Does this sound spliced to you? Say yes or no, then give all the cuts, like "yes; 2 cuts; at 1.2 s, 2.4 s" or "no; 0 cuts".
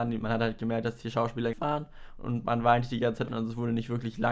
yes; 2 cuts; at 1.5 s, 3.3 s